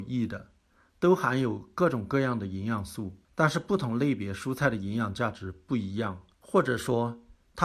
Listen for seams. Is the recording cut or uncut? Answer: cut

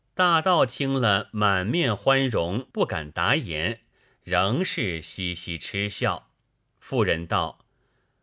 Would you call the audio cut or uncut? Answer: cut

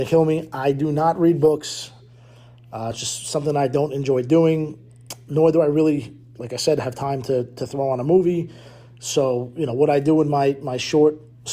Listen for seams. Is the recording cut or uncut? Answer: uncut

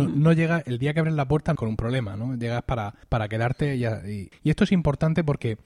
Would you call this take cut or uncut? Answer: cut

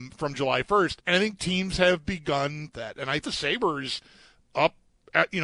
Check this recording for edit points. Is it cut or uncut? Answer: cut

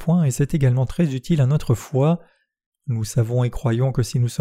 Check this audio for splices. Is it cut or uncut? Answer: uncut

